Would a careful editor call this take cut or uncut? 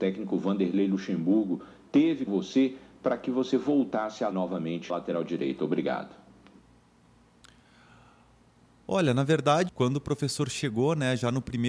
cut